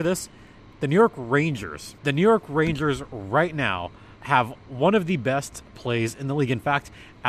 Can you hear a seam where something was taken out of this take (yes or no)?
yes